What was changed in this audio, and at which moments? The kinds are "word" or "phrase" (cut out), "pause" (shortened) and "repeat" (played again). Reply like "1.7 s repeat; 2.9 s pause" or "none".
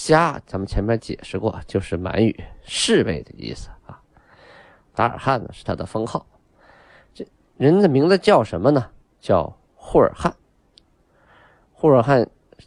none